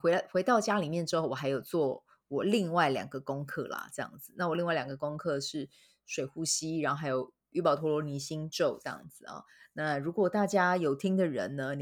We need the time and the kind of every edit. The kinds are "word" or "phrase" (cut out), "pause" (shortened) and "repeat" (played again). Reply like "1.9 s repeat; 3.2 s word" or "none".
none